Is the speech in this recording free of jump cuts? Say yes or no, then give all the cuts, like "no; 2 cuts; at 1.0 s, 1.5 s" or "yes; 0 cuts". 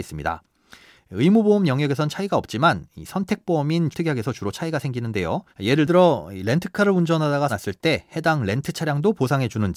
no; 3 cuts; at 3.9 s, 5.5 s, 7.5 s